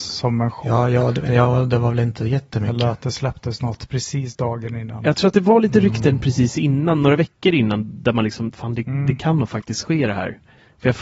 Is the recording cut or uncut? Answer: uncut